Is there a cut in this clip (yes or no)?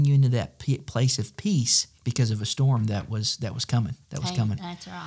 yes